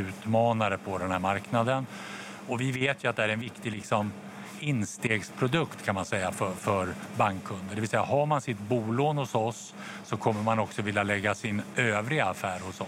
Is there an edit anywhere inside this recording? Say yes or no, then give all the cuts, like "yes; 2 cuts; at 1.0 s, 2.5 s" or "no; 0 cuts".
no; 0 cuts